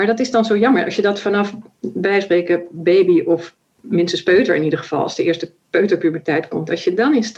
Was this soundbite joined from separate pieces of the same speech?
no; 0 cuts

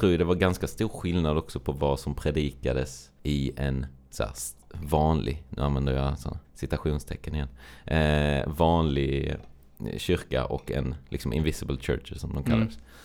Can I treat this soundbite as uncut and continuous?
no; 2 cuts; at 3.2 s, 6.4 s

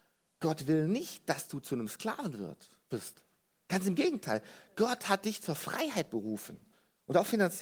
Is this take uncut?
yes; 0 cuts

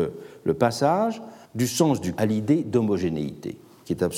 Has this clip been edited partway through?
yes; 2 cuts; at 1.4 s, 2.2 s

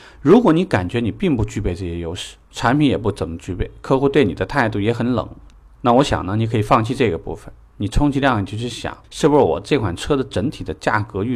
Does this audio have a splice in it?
yes; 2 cuts; at 5.5 s, 9.0 s

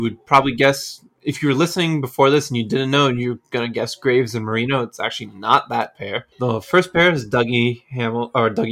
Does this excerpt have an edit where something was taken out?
yes; 1 cut; at 6.3 s

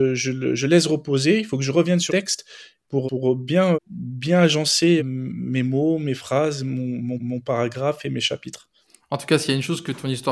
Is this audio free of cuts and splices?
no; 6 cuts; at 2.1 s, 3.1 s, 3.7 s, 5.0 s, 7.2 s, 8.8 s

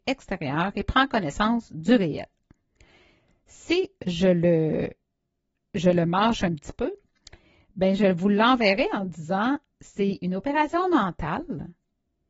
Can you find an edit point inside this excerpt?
no; 0 cuts

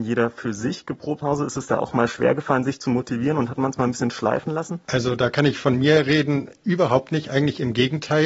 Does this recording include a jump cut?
yes; 1 cut; at 1.2 s

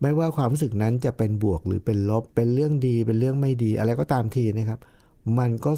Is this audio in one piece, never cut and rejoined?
no; 1 cut; at 2.3 s

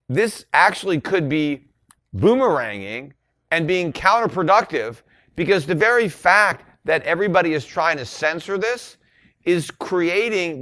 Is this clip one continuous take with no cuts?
yes; 0 cuts

